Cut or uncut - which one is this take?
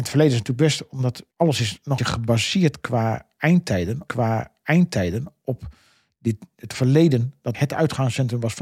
cut